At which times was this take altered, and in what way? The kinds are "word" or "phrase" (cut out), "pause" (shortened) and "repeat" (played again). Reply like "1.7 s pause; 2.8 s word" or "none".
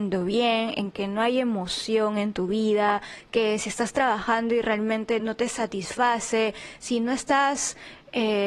5.2 s word